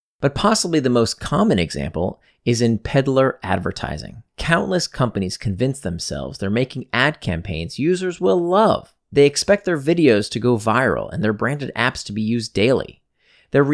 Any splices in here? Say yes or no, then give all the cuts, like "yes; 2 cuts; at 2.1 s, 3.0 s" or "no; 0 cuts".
yes; 2 cuts; at 4.3 s, 9.0 s